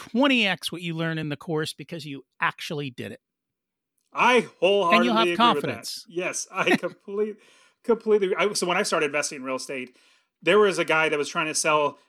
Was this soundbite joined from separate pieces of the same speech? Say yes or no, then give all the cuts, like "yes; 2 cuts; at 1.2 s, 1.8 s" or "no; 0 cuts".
no; 0 cuts